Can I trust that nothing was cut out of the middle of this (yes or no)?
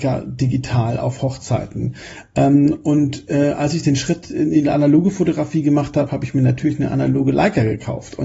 yes